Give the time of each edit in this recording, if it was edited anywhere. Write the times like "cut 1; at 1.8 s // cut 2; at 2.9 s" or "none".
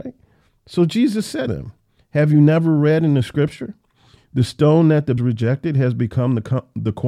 cut 1; at 1.5 s // cut 2; at 5.2 s